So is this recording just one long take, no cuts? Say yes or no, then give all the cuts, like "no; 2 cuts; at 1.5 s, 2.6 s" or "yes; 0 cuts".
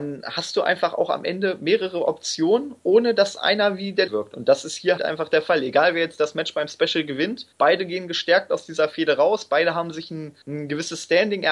no; 4 cuts; at 4.1 s, 5.0 s, 7.5 s, 10.4 s